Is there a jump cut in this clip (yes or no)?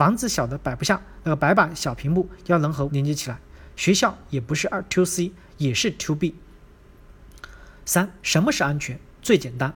yes